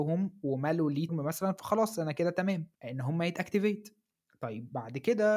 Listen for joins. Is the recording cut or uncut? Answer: cut